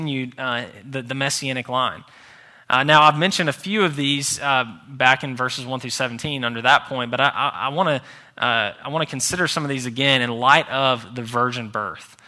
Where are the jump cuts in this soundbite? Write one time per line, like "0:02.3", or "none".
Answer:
none